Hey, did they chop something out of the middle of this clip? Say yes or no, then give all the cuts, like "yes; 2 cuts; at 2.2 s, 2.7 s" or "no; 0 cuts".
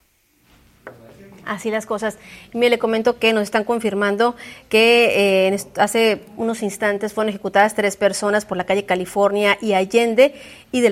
no; 0 cuts